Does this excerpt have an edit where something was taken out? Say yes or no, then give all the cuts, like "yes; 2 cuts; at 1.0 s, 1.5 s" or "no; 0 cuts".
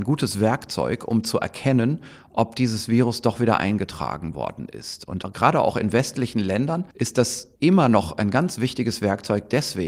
yes; 2 cuts; at 6.9 s, 7.5 s